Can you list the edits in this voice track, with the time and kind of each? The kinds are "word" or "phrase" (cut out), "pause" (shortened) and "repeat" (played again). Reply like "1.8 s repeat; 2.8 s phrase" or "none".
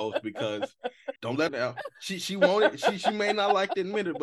1.2 s pause; 1.5 s phrase